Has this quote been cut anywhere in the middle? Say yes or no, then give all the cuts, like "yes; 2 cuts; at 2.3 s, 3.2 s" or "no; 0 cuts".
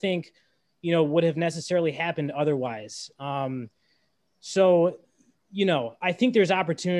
no; 0 cuts